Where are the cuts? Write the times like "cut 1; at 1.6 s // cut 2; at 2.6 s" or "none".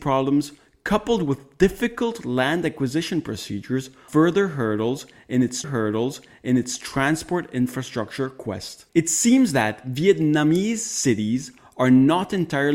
cut 1; at 4.1 s // cut 2; at 5.6 s // cut 3; at 8.9 s